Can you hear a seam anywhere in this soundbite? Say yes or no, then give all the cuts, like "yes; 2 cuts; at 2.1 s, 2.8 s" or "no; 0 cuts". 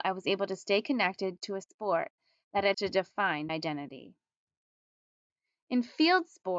yes; 2 cuts; at 2.7 s, 3.5 s